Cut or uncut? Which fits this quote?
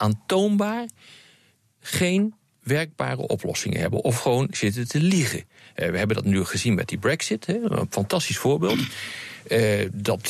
uncut